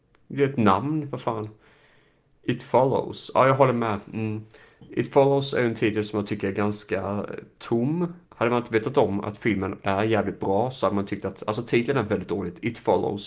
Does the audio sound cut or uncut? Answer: cut